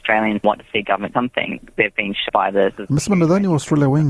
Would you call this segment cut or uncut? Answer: cut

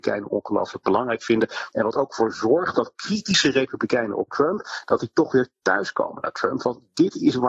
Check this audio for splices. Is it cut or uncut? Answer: uncut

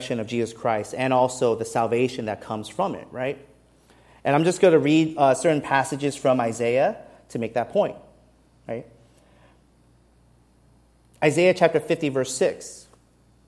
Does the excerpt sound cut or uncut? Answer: uncut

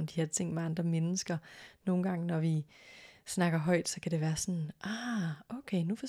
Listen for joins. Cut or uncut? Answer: uncut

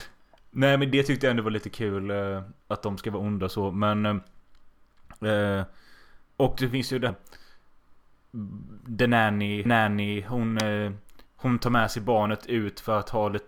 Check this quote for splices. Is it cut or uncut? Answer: cut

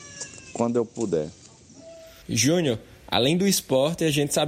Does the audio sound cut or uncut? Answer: cut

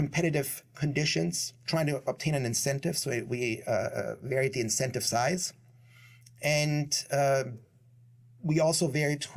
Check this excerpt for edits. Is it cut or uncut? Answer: uncut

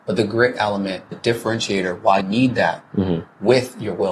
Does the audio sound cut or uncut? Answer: cut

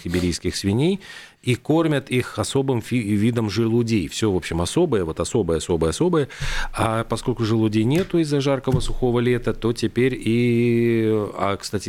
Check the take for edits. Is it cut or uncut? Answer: uncut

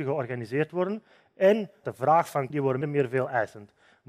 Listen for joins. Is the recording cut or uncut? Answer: cut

